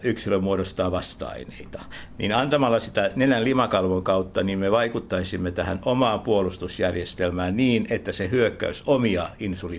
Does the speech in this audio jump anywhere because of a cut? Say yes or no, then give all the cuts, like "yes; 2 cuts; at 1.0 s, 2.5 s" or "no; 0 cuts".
no; 0 cuts